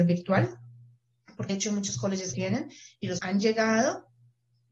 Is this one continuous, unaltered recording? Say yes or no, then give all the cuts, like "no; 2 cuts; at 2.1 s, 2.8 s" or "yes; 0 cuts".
no; 3 cuts; at 1.5 s, 2.3 s, 3.2 s